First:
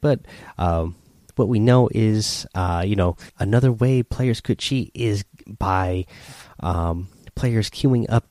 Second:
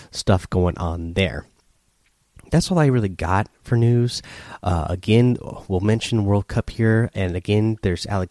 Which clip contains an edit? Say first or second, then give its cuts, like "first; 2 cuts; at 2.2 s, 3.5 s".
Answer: first; 1 cut; at 3.3 s